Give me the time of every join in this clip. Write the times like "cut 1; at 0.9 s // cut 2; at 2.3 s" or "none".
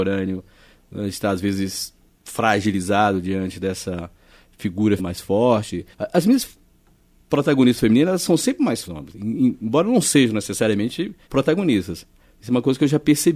cut 1; at 5.0 s // cut 2; at 5.9 s // cut 3; at 8.8 s // cut 4; at 11.2 s

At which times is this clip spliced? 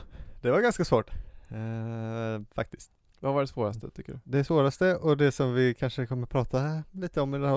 none

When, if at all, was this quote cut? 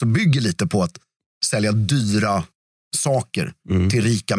none

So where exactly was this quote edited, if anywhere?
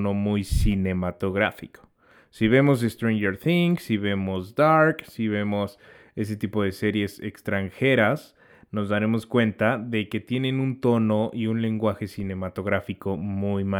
none

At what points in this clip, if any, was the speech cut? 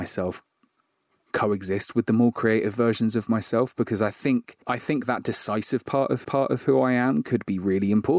cut 1; at 4.6 s // cut 2; at 6.2 s

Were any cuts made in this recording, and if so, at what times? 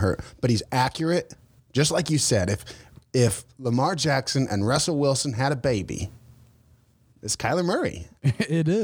none

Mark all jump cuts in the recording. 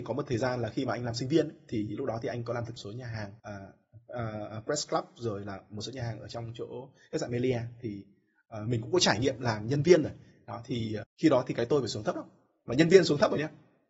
cut 1; at 2.8 s // cut 2; at 3.4 s // cut 3; at 11.0 s

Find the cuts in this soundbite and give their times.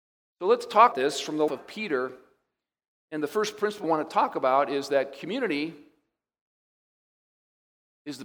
cut 1; at 0.9 s // cut 2; at 1.5 s // cut 3; at 3.8 s

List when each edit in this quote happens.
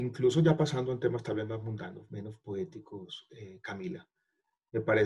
cut 1; at 2.1 s

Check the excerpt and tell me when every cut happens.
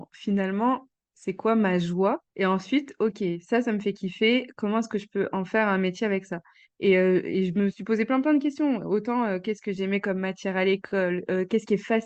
cut 1; at 2.3 s

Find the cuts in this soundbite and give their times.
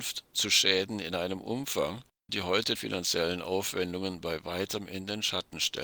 cut 1; at 2.3 s // cut 2; at 2.7 s

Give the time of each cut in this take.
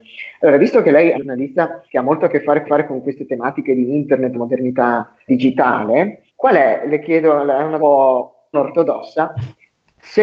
cut 1; at 1.1 s // cut 2; at 1.9 s // cut 3; at 2.6 s // cut 4; at 4.3 s // cut 5; at 5.3 s // cut 6; at 6.3 s // cut 7; at 7.8 s // cut 8; at 8.5 s

